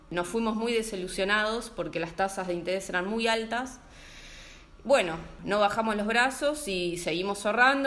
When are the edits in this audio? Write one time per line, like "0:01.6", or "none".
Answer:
0:04.8